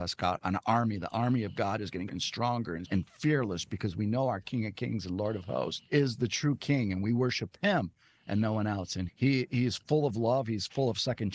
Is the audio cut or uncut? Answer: cut